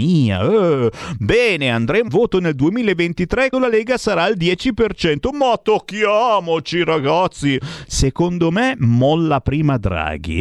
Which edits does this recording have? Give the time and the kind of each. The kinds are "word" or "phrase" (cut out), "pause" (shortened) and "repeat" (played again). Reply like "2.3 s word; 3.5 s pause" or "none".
2.1 s word; 3.5 s word